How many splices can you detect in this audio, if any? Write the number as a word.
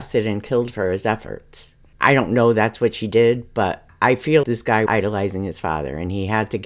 two